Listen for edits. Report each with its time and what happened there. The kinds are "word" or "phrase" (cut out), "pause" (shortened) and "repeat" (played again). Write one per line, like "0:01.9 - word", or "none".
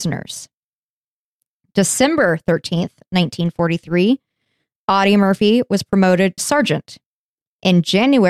0:06.4 - word